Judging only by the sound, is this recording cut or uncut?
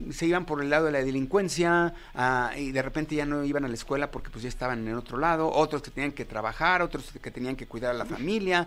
uncut